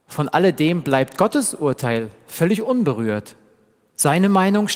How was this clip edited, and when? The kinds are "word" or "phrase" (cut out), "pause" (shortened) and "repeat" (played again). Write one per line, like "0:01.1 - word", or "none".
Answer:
none